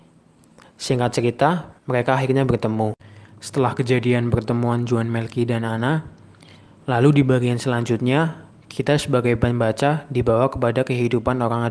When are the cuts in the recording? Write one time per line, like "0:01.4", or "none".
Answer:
0:01.8